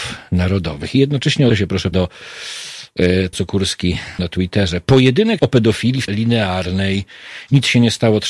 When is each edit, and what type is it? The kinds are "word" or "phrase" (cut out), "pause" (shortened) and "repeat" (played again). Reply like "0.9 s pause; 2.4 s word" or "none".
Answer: 1.5 s word; 1.9 s word; 3.3 s word; 4.2 s word; 5.4 s word; 6.1 s word